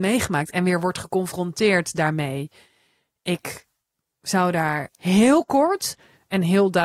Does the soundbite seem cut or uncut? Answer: uncut